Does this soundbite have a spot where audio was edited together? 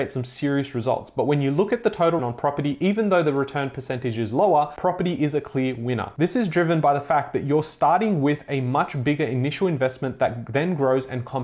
yes; 1 cut; at 2.2 s

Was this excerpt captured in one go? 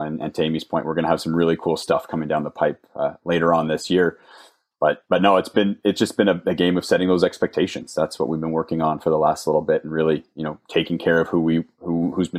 yes; 0 cuts

